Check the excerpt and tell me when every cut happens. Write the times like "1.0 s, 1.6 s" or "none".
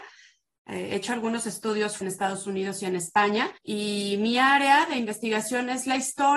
2.0 s, 3.6 s